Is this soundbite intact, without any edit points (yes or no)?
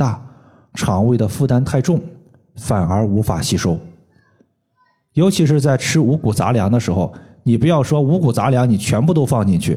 yes